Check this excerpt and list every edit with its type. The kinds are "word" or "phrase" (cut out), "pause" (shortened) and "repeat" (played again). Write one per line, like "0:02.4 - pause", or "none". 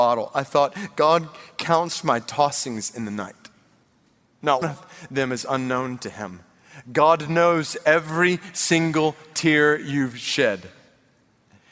0:04.6 - word

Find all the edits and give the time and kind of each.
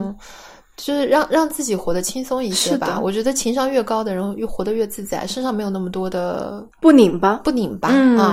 0:06.7 - pause

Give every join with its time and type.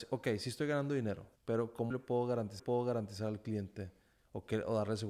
0:01.4 - pause
0:01.9 - word
0:02.6 - repeat

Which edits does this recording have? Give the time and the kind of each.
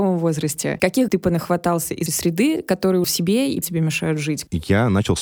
0:01.1 - word
0:02.1 - word
0:03.0 - phrase
0:03.6 - phrase

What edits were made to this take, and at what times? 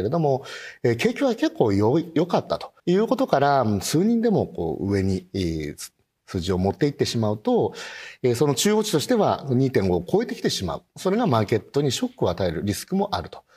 0:02.8 - pause
0:10.9 - pause

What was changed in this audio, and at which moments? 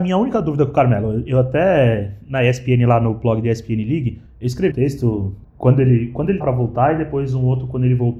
0:04.7 - word
0:06.4 - word

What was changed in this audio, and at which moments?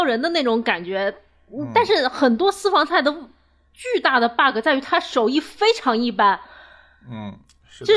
none

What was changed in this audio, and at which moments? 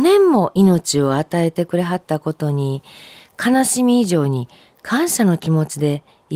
none

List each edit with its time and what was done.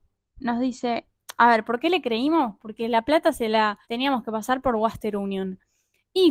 0:03.8 - pause

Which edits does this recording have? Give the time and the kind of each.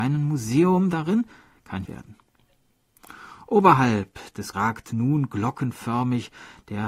0:01.9 - phrase
0:04.5 - word

